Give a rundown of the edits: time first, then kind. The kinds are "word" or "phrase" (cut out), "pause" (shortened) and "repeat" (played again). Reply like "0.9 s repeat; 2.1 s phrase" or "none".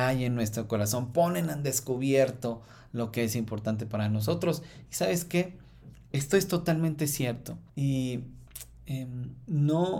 7.7 s pause

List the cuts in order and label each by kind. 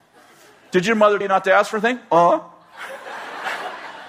1.2 s word

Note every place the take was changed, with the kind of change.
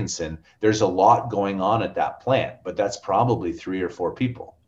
none

